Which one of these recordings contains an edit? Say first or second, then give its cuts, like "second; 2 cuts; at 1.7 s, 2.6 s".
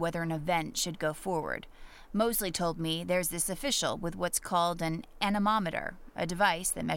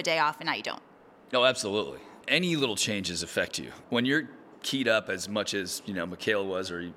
second; 1 cut; at 1.0 s